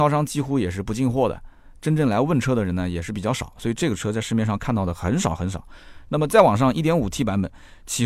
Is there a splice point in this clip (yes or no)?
no